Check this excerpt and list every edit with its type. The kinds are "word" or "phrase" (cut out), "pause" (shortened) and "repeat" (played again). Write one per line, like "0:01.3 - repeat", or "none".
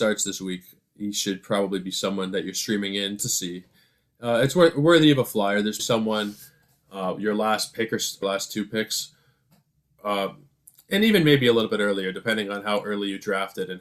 0:03.2 - word
0:05.8 - word
0:08.2 - phrase